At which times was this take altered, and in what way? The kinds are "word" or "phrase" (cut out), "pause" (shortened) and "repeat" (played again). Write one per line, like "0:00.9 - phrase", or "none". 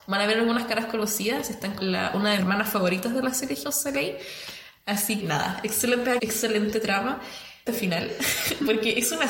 0:01.8 - word
0:02.4 - word
0:03.6 - word
0:05.2 - word
0:06.2 - word
0:07.7 - word

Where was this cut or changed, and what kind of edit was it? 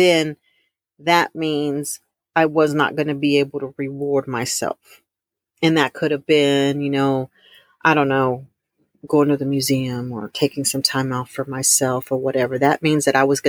none

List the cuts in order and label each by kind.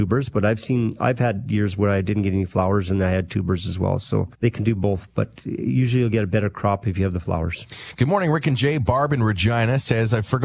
0:04.3 - pause

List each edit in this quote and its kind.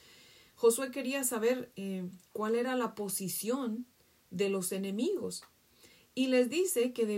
none

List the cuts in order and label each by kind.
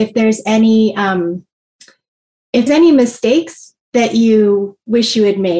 0:02.7 - word
0:03.8 - pause

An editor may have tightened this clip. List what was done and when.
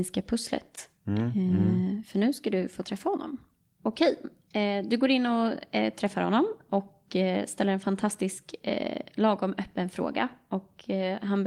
none

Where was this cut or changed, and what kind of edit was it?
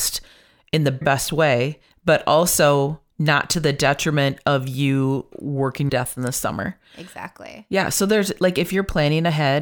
0:01.0 - word
0:03.1 - pause
0:05.3 - word
0:05.9 - phrase

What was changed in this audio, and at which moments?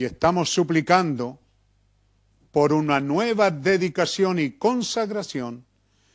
none

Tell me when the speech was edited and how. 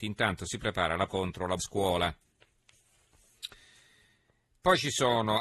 0:01.1 - word
0:01.6 - word

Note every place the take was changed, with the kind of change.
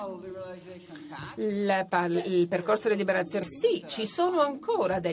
0:03.4 - word

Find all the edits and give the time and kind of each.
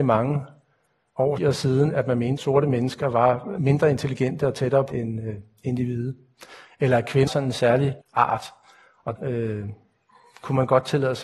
0:01.4 - word
0:02.4 - word
0:03.6 - word
0:04.9 - word
0:07.3 - word
0:08.0 - word
0:09.2 - word

